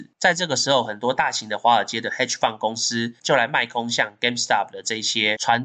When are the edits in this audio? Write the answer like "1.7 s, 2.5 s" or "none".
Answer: none